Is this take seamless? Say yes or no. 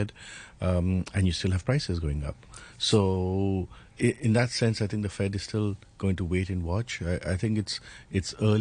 no